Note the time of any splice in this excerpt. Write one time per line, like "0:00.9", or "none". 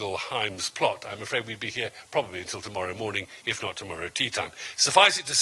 none